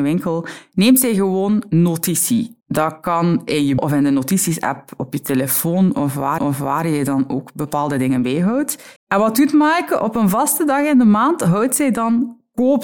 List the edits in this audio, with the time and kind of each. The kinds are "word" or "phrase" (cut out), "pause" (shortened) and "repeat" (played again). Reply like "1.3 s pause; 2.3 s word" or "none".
2.6 s pause; 3.8 s phrase; 6.4 s repeat; 9.0 s pause